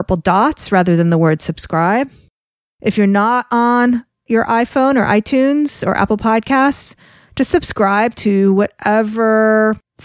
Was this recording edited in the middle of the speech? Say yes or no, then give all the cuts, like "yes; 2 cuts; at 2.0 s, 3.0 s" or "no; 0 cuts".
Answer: no; 0 cuts